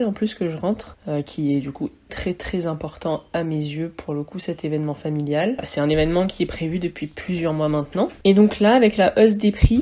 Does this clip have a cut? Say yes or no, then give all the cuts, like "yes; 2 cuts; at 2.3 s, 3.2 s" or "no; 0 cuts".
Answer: yes; 1 cut; at 2.1 s